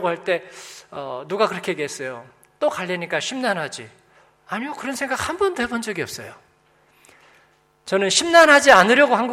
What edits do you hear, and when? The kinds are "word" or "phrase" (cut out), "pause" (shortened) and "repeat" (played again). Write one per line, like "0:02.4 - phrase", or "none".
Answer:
none